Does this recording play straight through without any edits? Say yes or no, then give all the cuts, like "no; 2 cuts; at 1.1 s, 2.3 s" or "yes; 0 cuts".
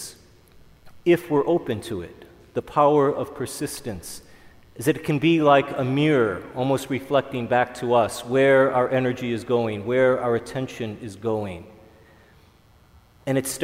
yes; 0 cuts